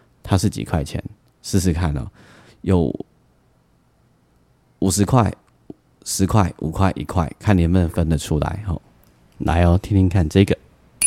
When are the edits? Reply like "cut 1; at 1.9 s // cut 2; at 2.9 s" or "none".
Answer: none